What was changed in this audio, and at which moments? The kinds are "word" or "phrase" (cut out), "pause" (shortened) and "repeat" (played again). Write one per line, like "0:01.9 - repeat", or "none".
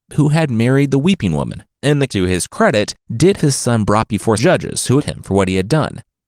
0:01.7 - pause
0:02.1 - word
0:03.4 - word
0:04.4 - word
0:05.0 - word